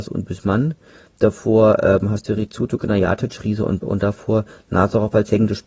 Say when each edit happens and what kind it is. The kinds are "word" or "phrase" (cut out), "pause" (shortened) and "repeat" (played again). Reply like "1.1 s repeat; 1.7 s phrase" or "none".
3.8 s word